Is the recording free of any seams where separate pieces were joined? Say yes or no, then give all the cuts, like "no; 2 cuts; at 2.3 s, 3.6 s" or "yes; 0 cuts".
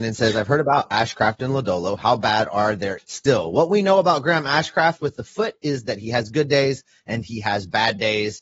no; 1 cut; at 3.0 s